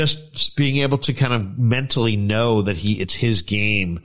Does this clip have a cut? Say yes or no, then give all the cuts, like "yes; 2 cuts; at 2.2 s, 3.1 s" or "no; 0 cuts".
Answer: no; 0 cuts